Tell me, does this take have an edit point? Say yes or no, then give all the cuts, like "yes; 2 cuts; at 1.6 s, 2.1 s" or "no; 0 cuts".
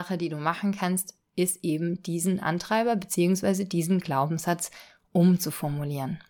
no; 0 cuts